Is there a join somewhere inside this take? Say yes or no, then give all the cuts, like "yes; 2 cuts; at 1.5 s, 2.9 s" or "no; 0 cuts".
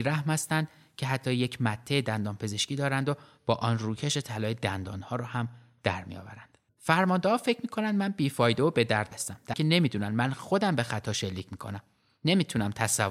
yes; 2 cuts; at 9.1 s, 9.5 s